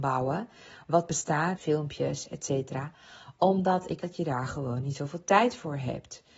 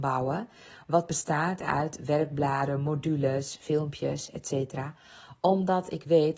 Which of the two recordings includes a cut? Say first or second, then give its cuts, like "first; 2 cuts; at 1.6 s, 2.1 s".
first; 2 cuts; at 1.6 s, 4.0 s